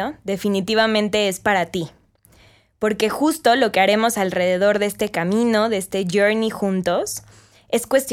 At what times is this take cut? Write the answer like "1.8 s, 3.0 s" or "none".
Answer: none